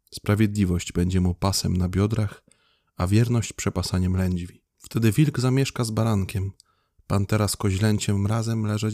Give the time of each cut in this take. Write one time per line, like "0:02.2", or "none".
none